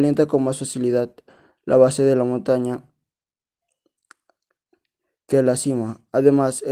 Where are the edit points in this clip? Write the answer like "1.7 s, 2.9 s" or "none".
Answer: none